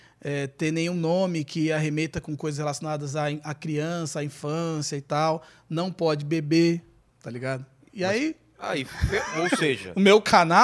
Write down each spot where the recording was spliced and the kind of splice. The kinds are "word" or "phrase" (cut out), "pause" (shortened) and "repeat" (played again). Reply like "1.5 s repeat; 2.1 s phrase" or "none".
none